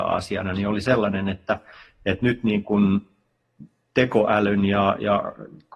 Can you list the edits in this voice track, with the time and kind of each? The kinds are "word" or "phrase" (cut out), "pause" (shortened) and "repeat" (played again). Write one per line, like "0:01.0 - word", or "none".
none